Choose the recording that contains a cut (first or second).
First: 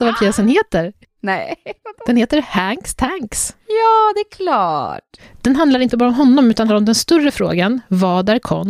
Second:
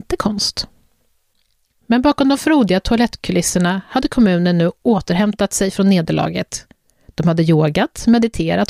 first